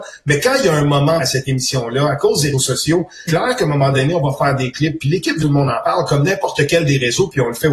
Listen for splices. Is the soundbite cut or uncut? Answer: cut